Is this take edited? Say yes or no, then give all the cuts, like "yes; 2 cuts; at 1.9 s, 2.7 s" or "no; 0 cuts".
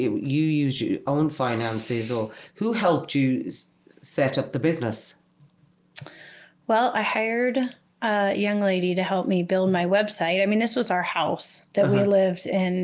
no; 0 cuts